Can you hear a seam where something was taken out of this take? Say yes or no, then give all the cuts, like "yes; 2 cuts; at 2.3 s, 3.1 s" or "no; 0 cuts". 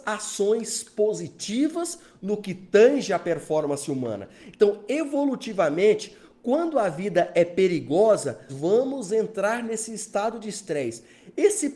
yes; 1 cut; at 8.5 s